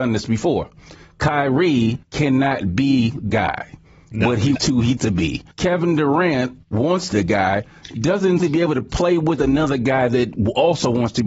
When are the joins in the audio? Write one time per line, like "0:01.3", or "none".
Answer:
0:02.0
0:03.3
0:04.5
0:05.0
0:05.5
0:06.6
0:07.1
0:08.4